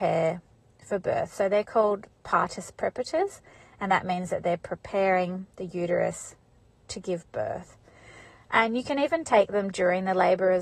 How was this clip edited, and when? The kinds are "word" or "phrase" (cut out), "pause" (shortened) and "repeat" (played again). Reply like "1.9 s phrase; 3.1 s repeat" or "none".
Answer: none